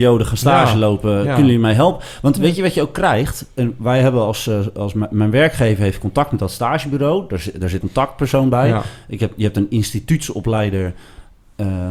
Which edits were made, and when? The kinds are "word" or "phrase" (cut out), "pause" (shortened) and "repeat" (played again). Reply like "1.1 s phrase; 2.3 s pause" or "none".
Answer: 7.8 s phrase